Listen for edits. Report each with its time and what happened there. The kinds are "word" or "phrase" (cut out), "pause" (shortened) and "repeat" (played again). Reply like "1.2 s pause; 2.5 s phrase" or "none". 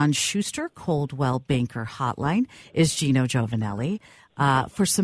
none